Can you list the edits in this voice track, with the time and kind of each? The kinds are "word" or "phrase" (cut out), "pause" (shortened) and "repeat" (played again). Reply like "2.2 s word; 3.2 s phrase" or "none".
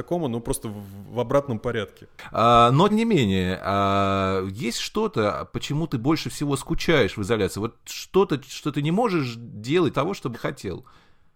2.9 s word; 9.9 s phrase; 10.3 s word